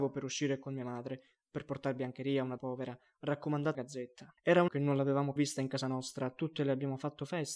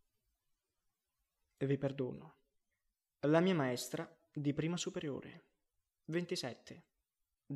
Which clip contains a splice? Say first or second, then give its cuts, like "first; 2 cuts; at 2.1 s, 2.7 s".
first; 5 cuts; at 2.6 s, 3.7 s, 4.4 s, 4.7 s, 5.4 s